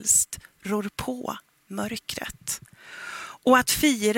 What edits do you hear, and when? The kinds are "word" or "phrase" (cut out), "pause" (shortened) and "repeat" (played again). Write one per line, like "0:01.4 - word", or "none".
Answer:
none